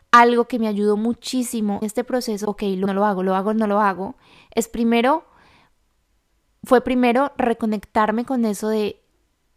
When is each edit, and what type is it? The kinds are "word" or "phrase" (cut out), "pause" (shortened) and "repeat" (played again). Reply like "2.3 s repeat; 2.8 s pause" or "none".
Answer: 1.8 s word; 2.4 s word; 2.9 s word